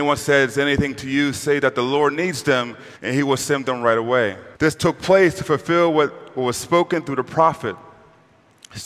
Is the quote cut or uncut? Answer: cut